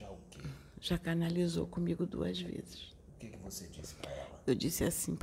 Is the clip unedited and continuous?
yes; 0 cuts

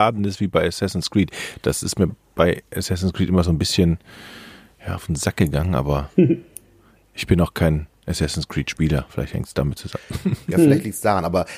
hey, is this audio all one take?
yes; 0 cuts

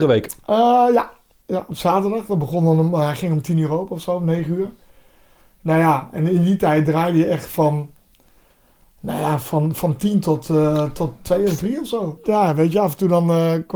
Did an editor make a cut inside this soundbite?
no; 0 cuts

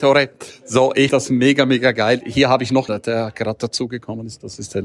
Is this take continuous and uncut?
no; 2 cuts; at 1.1 s, 2.9 s

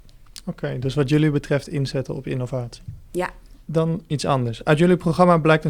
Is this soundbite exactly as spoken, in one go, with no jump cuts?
yes; 0 cuts

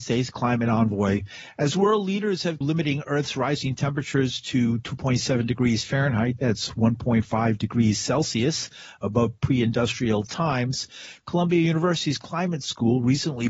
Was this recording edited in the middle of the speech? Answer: yes; 1 cut; at 2.6 s

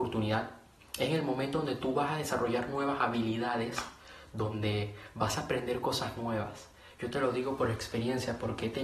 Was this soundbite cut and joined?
no; 0 cuts

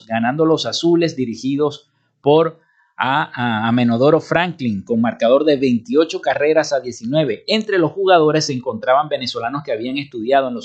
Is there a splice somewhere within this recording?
no; 0 cuts

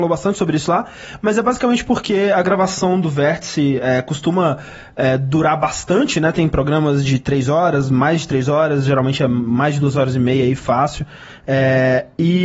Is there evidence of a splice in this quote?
no; 0 cuts

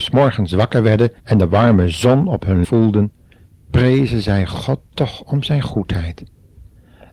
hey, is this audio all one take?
no; 2 cuts; at 1.2 s, 2.6 s

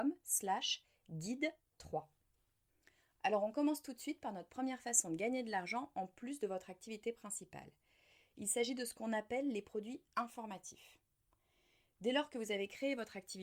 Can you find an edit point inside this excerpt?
no; 0 cuts

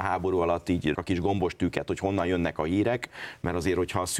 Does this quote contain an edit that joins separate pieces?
yes; 1 cut; at 0.9 s

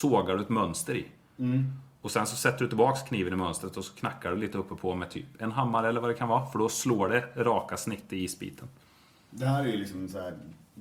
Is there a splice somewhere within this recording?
no; 0 cuts

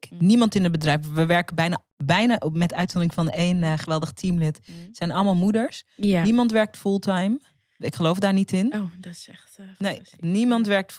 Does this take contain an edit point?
no; 0 cuts

